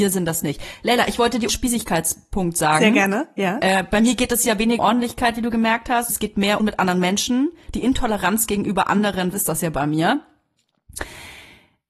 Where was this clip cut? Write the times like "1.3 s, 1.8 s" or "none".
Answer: 1.5 s, 4.8 s, 6.1 s, 6.6 s, 9.3 s